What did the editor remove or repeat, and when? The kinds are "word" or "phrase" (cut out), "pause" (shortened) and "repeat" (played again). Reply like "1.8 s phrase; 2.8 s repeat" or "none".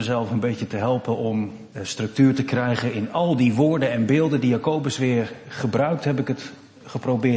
1.7 s pause